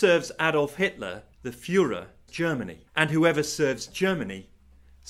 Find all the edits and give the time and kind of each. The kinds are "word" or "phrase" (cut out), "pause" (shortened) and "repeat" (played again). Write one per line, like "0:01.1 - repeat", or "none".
0:01.3 - pause
0:02.3 - word
0:02.9 - pause